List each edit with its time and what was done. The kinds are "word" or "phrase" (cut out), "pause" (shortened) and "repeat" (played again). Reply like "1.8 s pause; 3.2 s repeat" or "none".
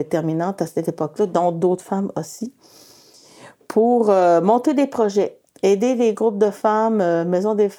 none